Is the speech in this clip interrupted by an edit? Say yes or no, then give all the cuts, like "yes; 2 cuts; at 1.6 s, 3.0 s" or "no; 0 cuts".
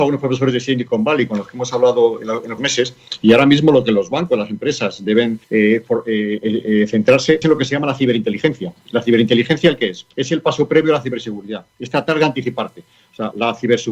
yes; 4 cuts; at 2.6 s, 5.4 s, 7.4 s, 10.1 s